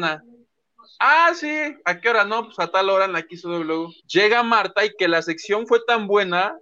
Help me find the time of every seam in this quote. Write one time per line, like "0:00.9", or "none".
0:04.0